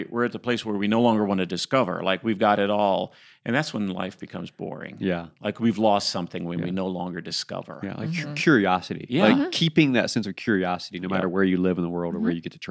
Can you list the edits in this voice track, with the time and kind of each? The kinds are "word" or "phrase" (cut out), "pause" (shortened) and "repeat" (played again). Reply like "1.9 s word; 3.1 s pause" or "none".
none